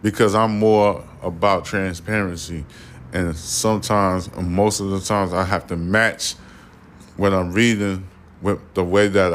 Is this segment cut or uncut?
uncut